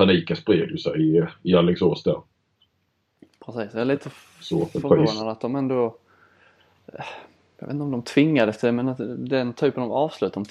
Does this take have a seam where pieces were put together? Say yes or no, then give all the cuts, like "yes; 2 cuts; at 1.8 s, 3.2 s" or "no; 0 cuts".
no; 0 cuts